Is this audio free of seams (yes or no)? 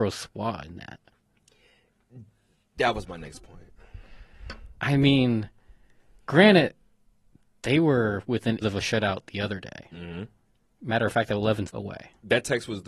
no